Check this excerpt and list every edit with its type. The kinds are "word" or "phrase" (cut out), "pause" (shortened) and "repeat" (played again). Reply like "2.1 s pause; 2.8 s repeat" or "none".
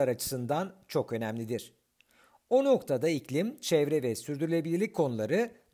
none